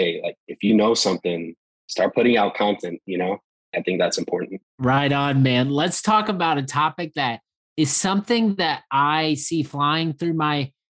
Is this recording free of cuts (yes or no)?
yes